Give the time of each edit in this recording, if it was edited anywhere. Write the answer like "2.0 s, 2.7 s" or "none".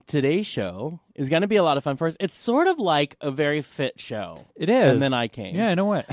4.5 s